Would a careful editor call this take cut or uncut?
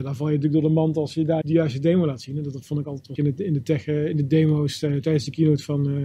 cut